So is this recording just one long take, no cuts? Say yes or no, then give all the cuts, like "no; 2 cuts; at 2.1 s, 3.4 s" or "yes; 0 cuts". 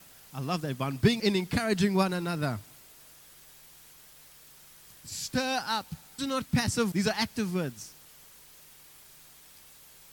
no; 3 cuts; at 1.2 s, 6.2 s, 6.9 s